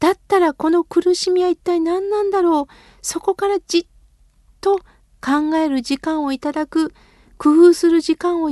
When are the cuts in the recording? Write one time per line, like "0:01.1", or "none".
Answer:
none